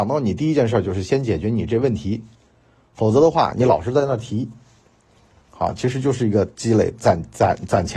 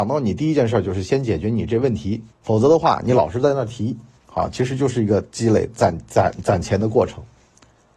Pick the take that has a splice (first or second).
second